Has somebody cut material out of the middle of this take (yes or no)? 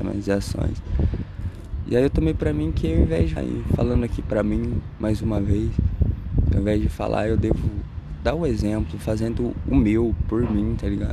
yes